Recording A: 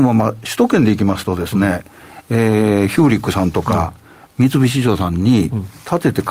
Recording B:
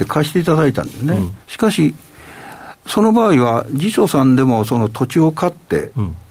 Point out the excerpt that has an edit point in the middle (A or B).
B